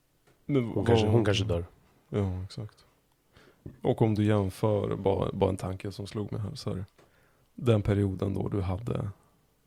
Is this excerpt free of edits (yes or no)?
yes